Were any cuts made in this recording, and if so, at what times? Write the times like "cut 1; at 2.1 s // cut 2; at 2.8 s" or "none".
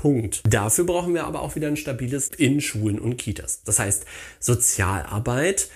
cut 1; at 2.3 s